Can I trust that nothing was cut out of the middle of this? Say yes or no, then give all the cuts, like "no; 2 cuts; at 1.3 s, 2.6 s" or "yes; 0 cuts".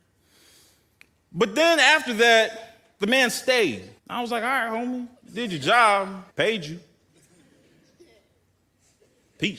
no; 3 cuts; at 4.0 s, 5.2 s, 6.3 s